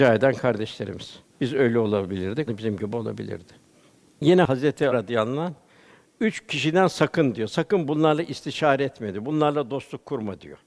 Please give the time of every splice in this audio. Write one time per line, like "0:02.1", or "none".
0:01.2
0:02.5
0:03.7
0:04.9